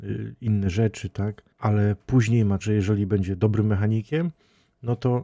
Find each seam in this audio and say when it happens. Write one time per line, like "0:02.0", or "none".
0:01.5
0:02.6